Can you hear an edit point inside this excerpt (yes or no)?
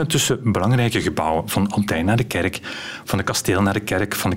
no